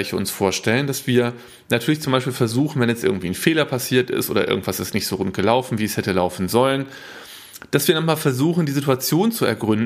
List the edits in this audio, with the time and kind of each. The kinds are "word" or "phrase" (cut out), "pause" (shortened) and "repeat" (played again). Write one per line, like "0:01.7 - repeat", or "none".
none